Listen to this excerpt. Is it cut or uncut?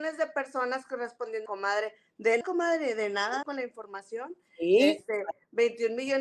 cut